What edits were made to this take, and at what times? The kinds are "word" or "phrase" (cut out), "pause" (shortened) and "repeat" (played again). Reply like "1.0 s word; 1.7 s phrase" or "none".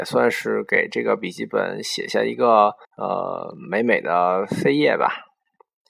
2.8 s pause